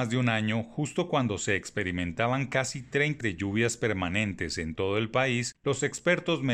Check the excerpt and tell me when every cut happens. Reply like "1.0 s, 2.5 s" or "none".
3.2 s